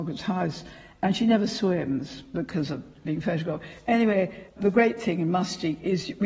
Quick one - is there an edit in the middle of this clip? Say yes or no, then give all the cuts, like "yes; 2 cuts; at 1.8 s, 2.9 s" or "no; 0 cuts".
yes; 1 cut; at 4.5 s